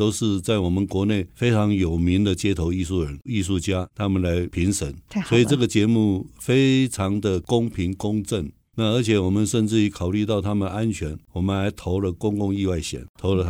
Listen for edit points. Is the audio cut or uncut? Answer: cut